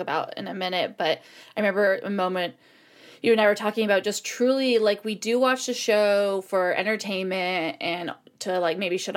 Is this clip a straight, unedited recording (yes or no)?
yes